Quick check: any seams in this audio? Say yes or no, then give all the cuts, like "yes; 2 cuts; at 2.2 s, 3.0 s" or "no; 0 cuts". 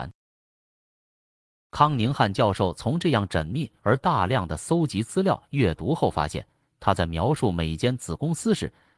no; 0 cuts